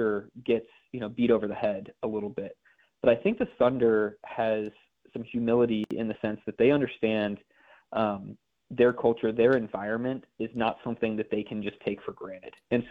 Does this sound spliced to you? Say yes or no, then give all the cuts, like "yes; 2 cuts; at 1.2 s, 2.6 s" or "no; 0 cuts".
no; 0 cuts